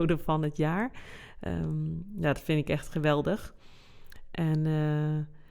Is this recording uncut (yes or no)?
yes